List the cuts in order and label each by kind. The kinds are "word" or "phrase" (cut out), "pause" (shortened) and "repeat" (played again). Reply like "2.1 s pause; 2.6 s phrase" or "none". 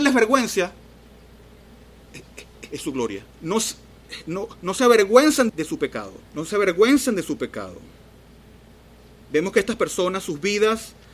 3.3 s pause; 5.5 s word; 6.2 s pause